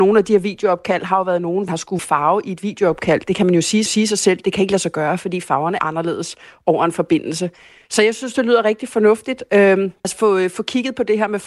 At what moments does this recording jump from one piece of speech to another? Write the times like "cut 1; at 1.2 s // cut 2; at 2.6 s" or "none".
cut 1; at 1.7 s // cut 2; at 2.0 s // cut 3; at 3.9 s // cut 4; at 5.8 s // cut 5; at 10.0 s

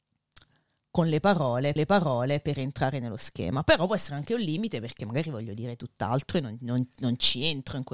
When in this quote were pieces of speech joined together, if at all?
cut 1; at 1.8 s

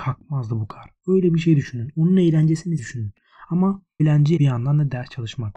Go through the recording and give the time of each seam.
cut 1; at 2.8 s // cut 2; at 4.0 s // cut 3; at 4.4 s

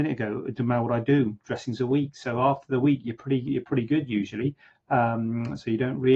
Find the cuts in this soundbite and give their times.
none

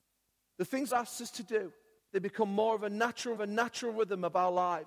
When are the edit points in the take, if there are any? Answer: cut 1; at 0.9 s // cut 2; at 2.0 s // cut 3; at 3.4 s

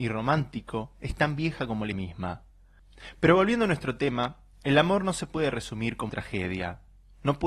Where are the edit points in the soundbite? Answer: cut 1; at 1.9 s // cut 2; at 6.1 s

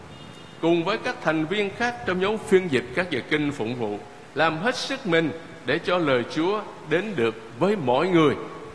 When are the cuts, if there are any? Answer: none

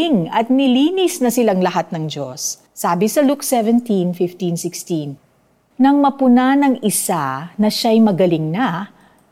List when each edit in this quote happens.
cut 1; at 2.7 s

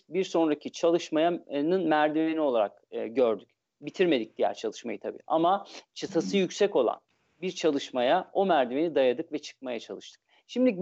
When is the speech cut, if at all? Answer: none

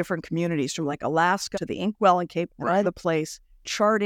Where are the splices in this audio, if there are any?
cut 1; at 1.5 s // cut 2; at 2.5 s // cut 3; at 2.8 s

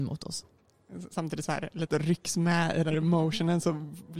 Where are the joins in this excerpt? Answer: cut 1; at 1.5 s // cut 2; at 1.9 s // cut 3; at 2.9 s

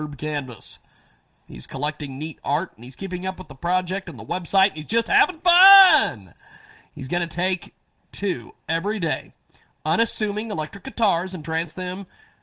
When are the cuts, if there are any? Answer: none

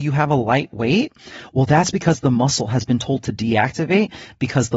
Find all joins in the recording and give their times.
none

